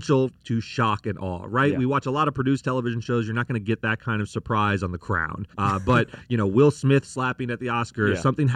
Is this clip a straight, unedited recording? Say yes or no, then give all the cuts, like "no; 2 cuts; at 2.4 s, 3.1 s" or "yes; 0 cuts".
no; 1 cut; at 5.5 s